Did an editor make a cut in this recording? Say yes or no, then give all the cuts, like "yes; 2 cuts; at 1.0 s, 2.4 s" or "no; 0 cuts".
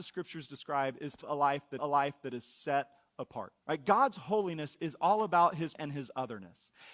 yes; 4 cuts; at 1.2 s, 1.8 s, 3.6 s, 5.7 s